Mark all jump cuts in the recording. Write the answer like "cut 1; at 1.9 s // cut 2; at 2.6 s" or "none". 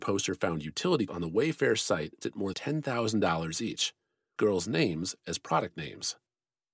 cut 1; at 1.1 s // cut 2; at 2.2 s // cut 3; at 2.5 s // cut 4; at 4.4 s

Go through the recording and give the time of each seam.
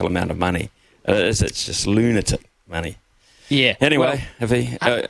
none

